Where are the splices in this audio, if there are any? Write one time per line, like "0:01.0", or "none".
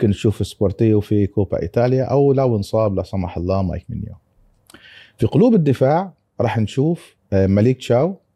none